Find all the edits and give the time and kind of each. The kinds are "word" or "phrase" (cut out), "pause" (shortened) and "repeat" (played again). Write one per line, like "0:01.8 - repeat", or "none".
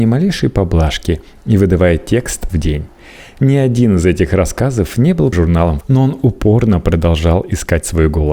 0:02.5 - phrase
0:05.3 - phrase
0:05.8 - word